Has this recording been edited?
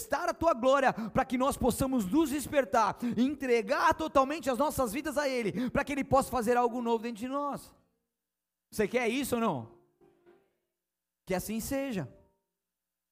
no; 0 cuts

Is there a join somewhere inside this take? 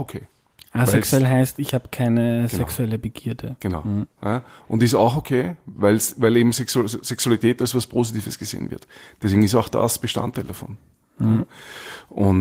no; 0 cuts

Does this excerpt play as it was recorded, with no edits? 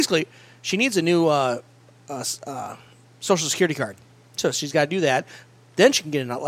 yes; 0 cuts

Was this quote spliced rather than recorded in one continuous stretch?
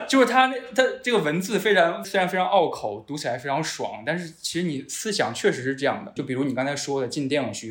yes; 2 cuts; at 2.0 s, 6.2 s

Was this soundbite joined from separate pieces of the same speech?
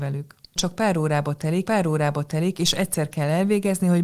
yes; 1 cut; at 1.6 s

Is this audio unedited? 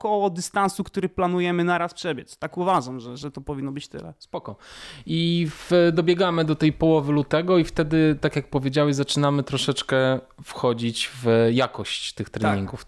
yes; 0 cuts

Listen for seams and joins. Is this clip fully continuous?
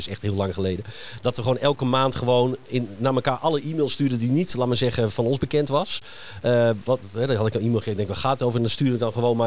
yes; 0 cuts

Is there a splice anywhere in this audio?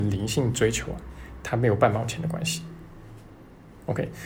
no; 0 cuts

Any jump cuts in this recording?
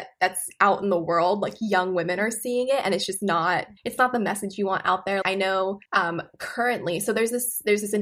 yes; 3 cuts; at 3.8 s, 5.2 s, 5.9 s

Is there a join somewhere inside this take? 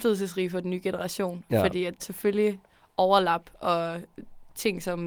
yes; 1 cut; at 2.0 s

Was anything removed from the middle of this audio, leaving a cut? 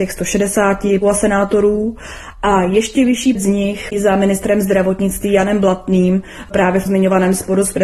yes; 4 cuts; at 1.0 s, 3.3 s, 3.9 s, 6.9 s

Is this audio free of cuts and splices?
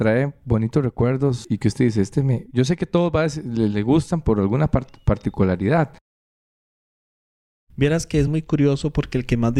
yes; 0 cuts

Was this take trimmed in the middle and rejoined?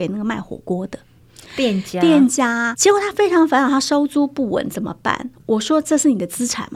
yes; 1 cut; at 2.7 s

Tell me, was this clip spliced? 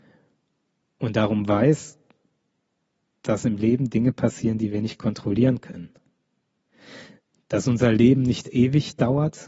no; 0 cuts

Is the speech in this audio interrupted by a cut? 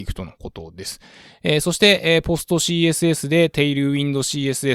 no; 0 cuts

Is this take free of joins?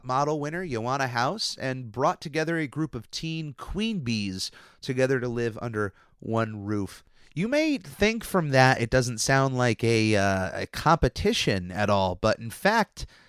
yes; 0 cuts

